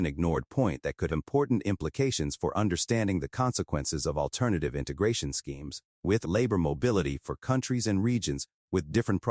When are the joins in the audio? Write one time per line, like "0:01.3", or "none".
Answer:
0:01.1
0:06.2